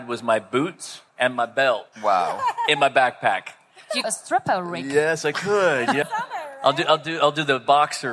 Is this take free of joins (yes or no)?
no